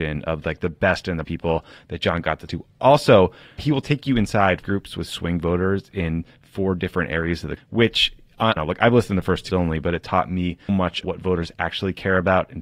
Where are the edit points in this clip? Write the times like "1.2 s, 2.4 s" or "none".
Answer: 1.2 s, 2.5 s, 3.6 s, 4.6 s, 7.6 s, 8.6 s, 9.5 s, 10.7 s, 11.0 s